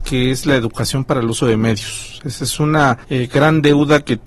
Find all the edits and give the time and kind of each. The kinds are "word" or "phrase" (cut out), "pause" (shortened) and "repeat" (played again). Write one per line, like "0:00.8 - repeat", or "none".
0:03.0 - pause